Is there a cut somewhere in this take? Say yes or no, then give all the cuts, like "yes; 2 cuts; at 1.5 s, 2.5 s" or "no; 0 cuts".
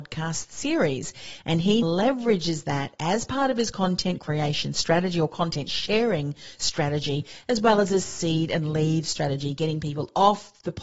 yes; 1 cut; at 1.8 s